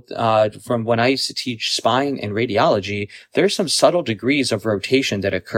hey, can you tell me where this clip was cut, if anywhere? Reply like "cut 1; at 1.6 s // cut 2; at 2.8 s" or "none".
none